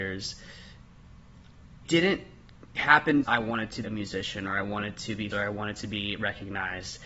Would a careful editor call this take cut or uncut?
cut